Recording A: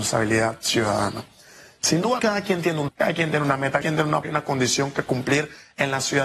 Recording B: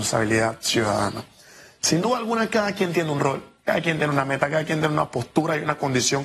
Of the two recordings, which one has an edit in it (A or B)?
A